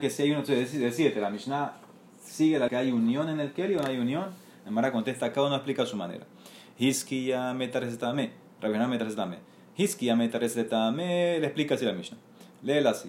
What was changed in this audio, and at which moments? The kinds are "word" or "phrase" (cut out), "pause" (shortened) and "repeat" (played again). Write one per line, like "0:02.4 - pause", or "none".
0:02.7 - word